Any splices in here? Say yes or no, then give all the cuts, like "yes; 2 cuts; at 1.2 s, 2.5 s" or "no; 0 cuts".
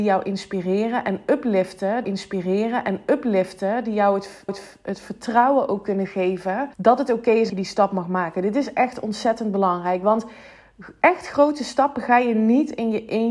yes; 4 cuts; at 2.0 s, 4.5 s, 6.7 s, 7.5 s